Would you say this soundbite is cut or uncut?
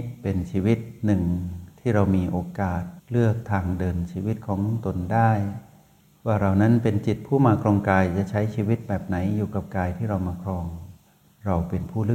uncut